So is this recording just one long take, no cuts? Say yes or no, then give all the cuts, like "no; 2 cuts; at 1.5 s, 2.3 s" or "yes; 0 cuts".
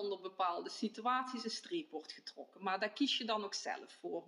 yes; 0 cuts